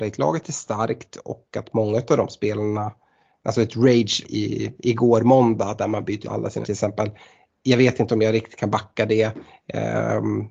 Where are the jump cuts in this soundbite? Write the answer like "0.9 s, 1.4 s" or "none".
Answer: 3.4 s, 4.2 s, 6.2 s, 6.6 s

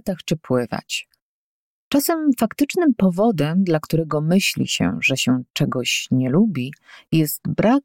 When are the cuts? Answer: none

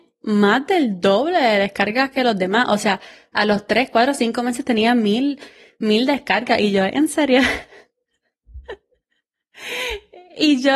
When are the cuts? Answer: none

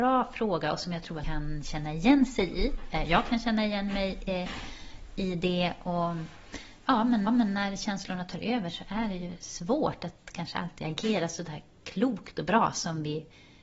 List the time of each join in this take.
1.2 s, 7.3 s

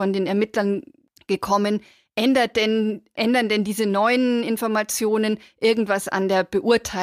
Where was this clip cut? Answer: none

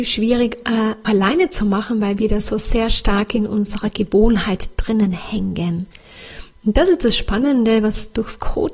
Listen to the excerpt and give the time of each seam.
1.0 s

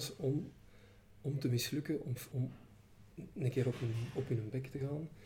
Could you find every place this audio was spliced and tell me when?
2.3 s

